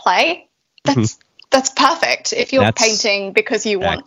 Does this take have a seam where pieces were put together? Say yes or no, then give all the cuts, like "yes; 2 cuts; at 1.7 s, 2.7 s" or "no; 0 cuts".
no; 0 cuts